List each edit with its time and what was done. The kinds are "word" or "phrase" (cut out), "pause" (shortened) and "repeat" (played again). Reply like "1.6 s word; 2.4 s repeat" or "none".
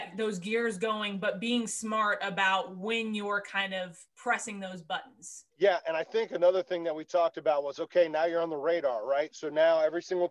4.1 s pause; 5.5 s pause